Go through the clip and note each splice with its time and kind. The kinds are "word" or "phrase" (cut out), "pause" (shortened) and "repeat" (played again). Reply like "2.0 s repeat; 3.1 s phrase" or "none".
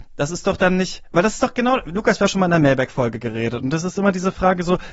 2.3 s word